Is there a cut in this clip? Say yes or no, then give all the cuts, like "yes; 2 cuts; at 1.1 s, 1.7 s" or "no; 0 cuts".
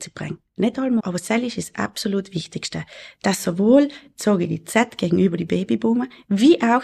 yes; 1 cut; at 1.0 s